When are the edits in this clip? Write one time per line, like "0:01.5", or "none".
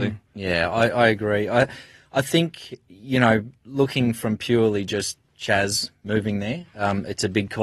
none